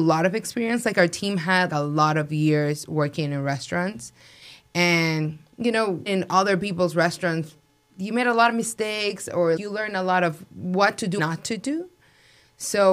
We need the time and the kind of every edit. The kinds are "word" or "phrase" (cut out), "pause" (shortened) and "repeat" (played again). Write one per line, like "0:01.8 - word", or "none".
0:01.7 - word
0:06.1 - word
0:09.6 - word
0:11.2 - word